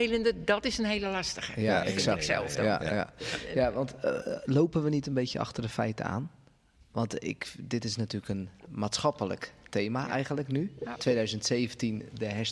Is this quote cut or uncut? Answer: uncut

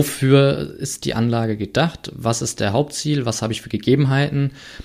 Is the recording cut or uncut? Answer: uncut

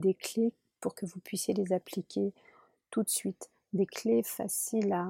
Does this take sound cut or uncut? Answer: uncut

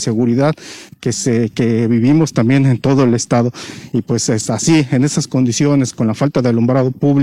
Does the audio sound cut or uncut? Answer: uncut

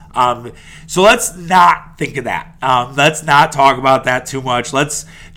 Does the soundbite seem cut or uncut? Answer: uncut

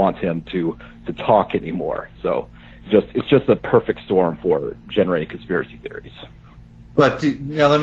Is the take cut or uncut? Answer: uncut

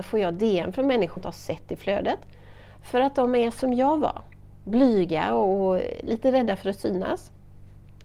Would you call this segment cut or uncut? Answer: cut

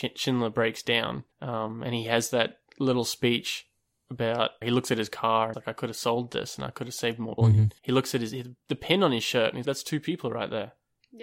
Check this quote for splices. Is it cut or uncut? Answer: cut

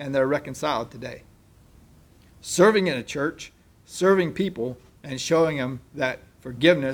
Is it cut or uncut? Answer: uncut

